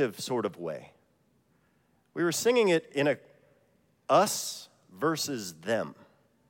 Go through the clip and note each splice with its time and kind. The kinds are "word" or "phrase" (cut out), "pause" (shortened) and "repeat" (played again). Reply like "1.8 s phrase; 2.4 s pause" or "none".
none